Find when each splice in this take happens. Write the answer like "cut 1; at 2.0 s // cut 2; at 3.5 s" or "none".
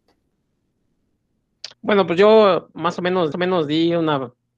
cut 1; at 1.7 s // cut 2; at 3.3 s